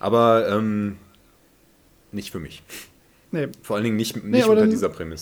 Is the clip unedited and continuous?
no; 1 cut; at 3.0 s

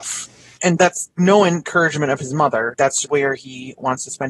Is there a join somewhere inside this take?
yes; 2 cuts; at 1.2 s, 3.0 s

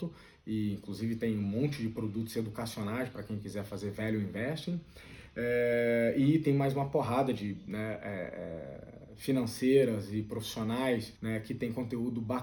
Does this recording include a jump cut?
yes; 1 cut; at 11.2 s

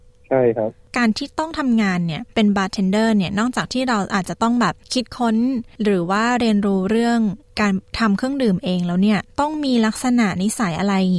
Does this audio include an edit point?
yes; 2 cuts; at 2.3 s, 7.9 s

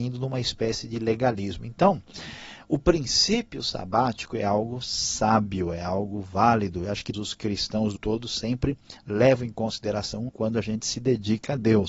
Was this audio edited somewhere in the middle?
yes; 3 cuts; at 7.1 s, 8.0 s, 10.3 s

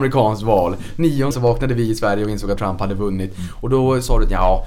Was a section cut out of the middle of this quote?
yes; 2 cuts; at 1.3 s, 2.6 s

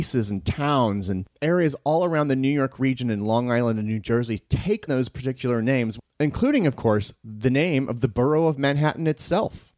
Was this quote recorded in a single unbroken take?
no; 1 cut; at 4.9 s

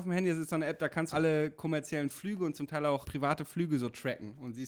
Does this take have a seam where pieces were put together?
yes; 2 cuts; at 1.1 s, 3.0 s

